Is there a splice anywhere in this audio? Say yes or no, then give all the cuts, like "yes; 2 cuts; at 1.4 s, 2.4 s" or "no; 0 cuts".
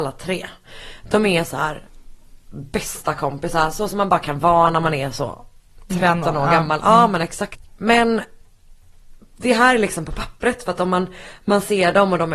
no; 0 cuts